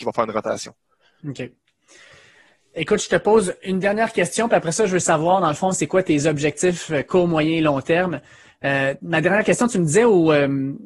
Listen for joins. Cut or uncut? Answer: uncut